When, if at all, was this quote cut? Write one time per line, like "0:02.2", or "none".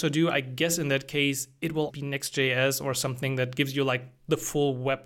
0:01.9